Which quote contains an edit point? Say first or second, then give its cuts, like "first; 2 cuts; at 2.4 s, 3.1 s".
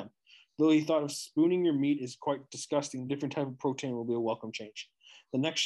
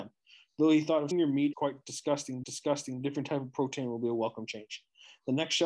second; 3 cuts; at 1.1 s, 1.5 s, 2.4 s